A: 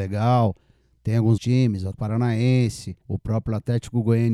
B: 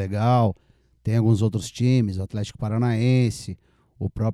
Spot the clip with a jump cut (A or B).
A